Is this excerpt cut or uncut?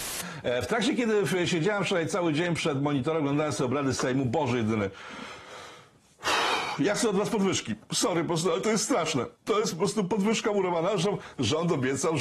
cut